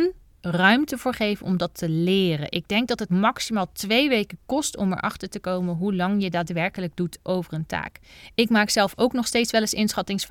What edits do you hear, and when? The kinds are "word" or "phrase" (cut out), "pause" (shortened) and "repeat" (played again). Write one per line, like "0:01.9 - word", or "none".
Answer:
none